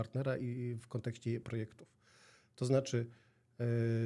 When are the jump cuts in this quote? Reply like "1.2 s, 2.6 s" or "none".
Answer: 1.4 s